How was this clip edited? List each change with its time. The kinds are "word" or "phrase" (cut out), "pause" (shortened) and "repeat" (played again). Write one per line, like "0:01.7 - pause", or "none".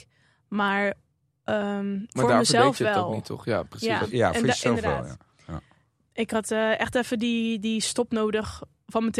none